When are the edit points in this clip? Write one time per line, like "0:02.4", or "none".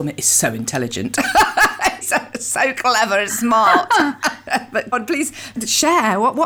0:02.0
0:03.3
0:04.9